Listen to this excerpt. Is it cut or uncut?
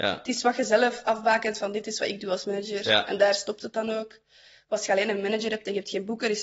uncut